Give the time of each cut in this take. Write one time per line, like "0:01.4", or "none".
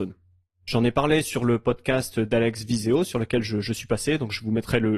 none